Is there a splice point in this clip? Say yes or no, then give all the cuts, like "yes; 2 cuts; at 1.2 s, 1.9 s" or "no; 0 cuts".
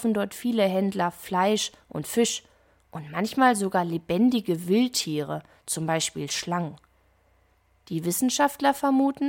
no; 0 cuts